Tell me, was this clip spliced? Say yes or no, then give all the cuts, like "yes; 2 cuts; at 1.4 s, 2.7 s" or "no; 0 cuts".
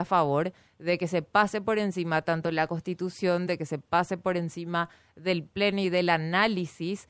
no; 0 cuts